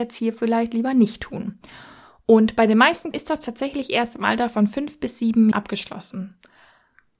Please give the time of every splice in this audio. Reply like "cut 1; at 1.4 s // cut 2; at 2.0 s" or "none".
cut 1; at 3.1 s // cut 2; at 5.5 s